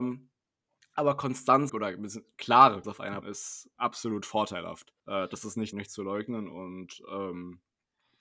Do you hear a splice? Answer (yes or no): yes